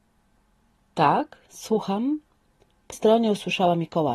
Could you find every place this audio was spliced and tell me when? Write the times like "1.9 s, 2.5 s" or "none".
2.9 s